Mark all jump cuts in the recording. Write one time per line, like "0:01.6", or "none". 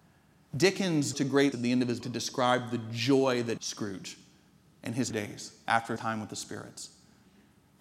0:01.1
0:01.5
0:02.0
0:03.6
0:05.1
0:06.0